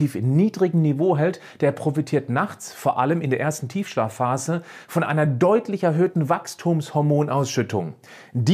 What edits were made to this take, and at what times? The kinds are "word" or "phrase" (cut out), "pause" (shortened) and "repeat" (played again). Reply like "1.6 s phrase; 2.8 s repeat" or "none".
none